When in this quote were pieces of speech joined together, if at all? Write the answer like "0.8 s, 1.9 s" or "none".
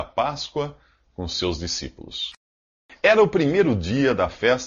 none